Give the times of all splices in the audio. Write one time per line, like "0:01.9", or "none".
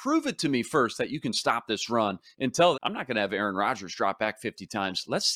0:02.7